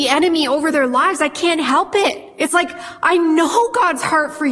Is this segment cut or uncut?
uncut